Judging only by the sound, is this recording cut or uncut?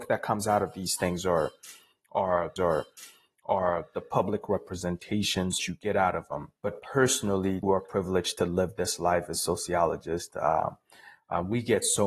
cut